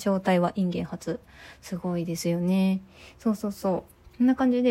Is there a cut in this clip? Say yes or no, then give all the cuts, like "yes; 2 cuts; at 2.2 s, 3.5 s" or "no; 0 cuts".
no; 0 cuts